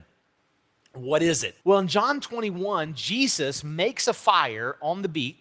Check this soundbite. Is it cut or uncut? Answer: cut